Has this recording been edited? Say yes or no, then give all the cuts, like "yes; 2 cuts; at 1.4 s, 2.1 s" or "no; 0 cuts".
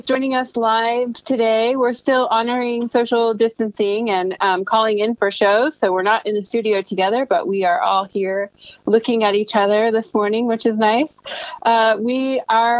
no; 0 cuts